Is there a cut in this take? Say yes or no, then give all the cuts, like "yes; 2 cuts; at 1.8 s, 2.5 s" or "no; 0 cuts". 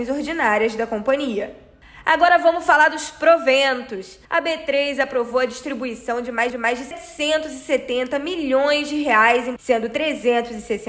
yes; 3 cuts; at 4.2 s, 6.5 s, 9.6 s